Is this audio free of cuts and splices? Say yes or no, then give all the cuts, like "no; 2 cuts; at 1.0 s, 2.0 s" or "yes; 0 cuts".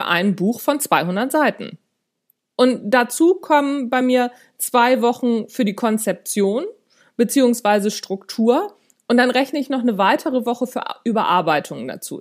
yes; 0 cuts